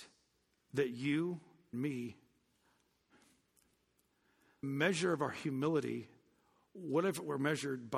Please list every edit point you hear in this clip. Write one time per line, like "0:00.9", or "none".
0:01.7
0:04.6